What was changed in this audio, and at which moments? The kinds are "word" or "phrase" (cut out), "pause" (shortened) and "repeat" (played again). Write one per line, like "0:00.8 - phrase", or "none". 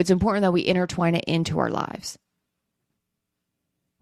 none